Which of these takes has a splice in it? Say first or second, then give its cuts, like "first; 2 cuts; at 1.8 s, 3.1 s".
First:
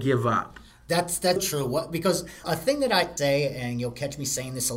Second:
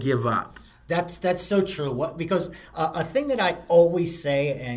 first; 3 cuts; at 1.4 s, 2.4 s, 3.2 s